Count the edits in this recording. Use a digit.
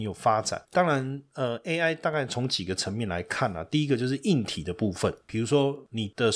0